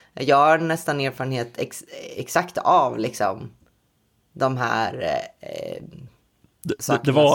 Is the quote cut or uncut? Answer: uncut